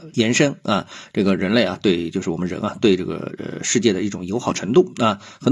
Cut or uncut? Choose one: uncut